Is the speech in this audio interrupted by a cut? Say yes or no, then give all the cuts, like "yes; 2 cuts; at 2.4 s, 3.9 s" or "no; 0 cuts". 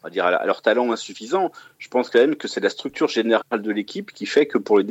no; 0 cuts